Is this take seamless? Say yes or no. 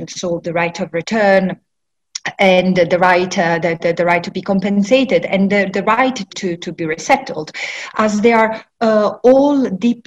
no